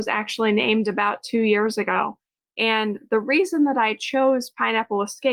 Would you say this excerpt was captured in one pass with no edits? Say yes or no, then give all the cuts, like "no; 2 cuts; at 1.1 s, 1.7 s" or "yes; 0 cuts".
yes; 0 cuts